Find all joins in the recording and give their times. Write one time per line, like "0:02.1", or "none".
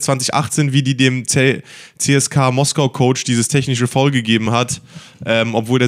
none